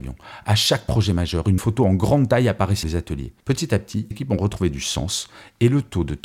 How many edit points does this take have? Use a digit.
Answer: 4